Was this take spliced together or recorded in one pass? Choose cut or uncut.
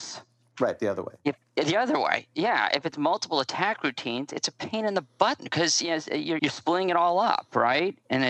cut